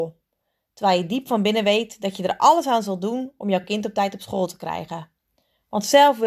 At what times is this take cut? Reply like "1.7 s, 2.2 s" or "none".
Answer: none